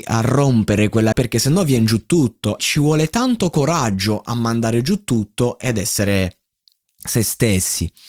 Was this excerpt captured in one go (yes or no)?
no